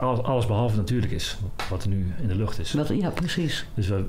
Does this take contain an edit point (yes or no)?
no